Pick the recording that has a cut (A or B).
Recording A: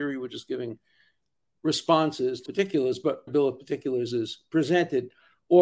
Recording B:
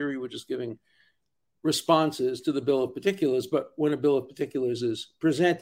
A